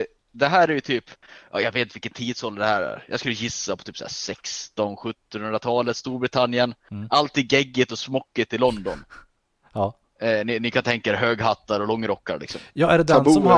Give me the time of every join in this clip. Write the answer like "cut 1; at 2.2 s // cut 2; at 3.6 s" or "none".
none